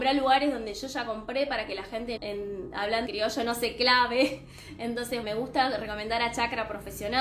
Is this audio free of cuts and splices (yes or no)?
no